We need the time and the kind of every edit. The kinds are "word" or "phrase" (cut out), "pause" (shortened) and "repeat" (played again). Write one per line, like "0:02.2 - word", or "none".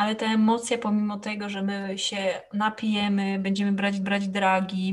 0:04.0 - repeat